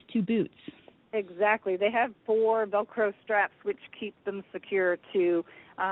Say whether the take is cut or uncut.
uncut